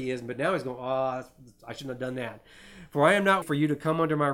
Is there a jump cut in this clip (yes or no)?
yes